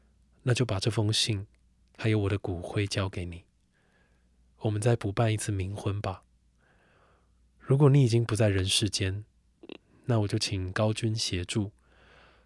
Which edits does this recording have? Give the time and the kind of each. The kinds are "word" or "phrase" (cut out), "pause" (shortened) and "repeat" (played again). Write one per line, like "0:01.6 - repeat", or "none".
none